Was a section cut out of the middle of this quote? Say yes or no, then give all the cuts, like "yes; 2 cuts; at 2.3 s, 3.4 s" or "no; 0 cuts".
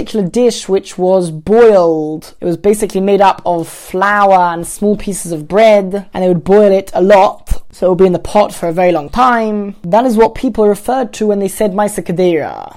no; 0 cuts